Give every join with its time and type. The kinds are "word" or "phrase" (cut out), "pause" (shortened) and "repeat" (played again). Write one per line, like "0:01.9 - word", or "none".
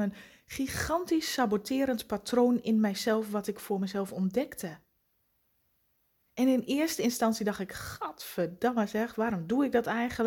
none